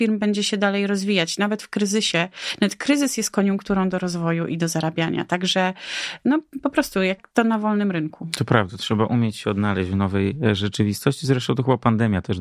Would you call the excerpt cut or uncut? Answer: uncut